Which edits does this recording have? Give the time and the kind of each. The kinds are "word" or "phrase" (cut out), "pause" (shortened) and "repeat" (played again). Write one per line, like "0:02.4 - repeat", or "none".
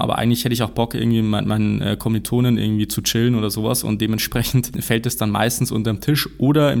none

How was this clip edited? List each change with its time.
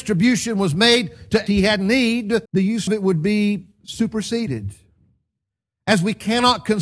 0:01.5 - phrase
0:02.5 - pause
0:02.9 - word
0:03.7 - pause

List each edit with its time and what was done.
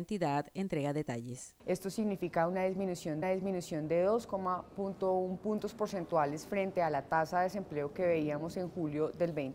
0:01.6 - pause
0:03.2 - repeat

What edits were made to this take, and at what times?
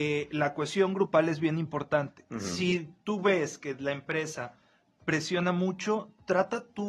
none

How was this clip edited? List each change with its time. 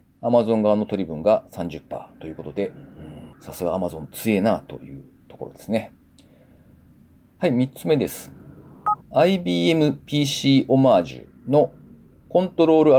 0:09.0 - pause

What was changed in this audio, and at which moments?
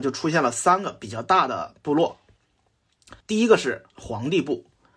0:03.2 - pause

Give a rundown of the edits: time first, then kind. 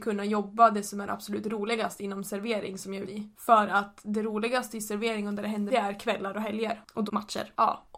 0:03.1 - word
0:05.7 - phrase
0:07.1 - phrase

